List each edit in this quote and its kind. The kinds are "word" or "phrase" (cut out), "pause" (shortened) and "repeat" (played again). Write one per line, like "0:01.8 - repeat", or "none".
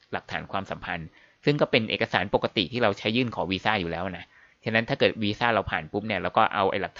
none